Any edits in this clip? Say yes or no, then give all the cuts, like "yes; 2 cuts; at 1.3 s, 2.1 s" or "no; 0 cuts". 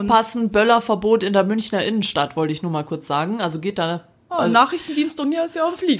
no; 0 cuts